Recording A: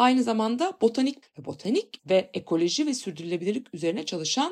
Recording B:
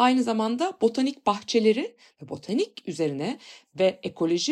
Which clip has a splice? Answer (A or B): A